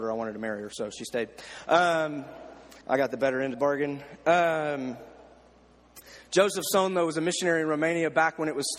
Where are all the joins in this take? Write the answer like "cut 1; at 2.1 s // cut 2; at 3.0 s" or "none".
cut 1; at 2.8 s // cut 2; at 3.5 s